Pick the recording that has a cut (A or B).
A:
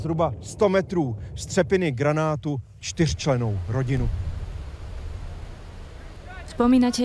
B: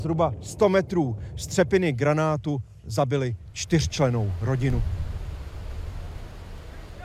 A